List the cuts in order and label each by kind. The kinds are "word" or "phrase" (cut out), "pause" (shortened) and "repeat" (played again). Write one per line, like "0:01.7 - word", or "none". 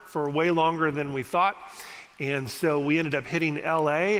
none